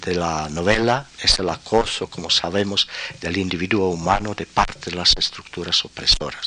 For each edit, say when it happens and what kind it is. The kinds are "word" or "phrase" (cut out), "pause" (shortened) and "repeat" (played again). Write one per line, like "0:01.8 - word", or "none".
0:01.1 - pause